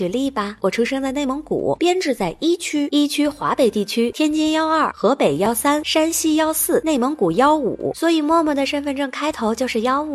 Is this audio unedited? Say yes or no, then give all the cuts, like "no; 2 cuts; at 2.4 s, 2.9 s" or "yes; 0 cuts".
no; 1 cut; at 4.1 s